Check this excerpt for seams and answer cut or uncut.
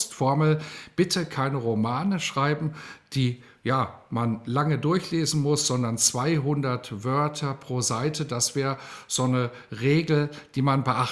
uncut